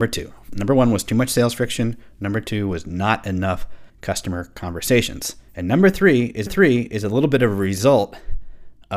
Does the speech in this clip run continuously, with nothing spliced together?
no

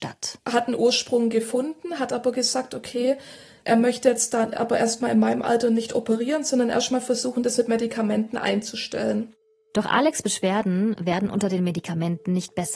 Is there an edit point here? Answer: no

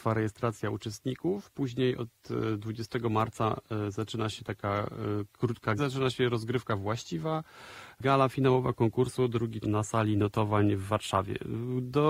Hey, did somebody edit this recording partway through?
yes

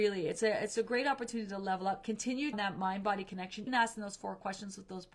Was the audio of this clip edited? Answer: yes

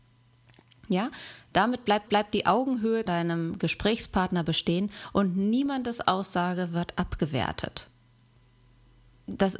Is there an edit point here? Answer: yes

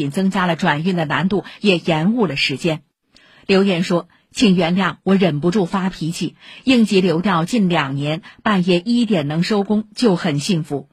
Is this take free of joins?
yes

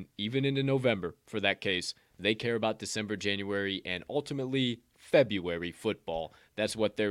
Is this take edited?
no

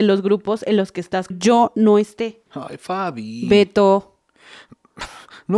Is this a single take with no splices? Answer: no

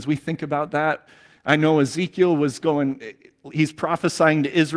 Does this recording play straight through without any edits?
yes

